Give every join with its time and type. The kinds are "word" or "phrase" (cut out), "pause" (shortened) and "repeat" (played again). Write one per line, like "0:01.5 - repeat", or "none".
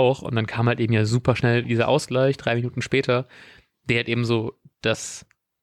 none